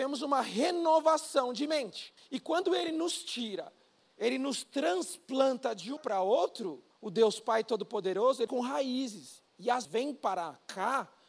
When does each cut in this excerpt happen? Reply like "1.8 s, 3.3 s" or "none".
2.2 s, 3.9 s, 6.0 s, 6.9 s, 8.5 s, 9.5 s, 9.8 s